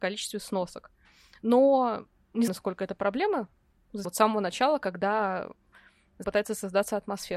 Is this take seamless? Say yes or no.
no